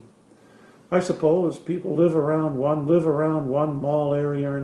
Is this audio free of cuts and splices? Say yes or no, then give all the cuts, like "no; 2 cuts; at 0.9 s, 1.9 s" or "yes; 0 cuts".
no; 1 cut; at 2.9 s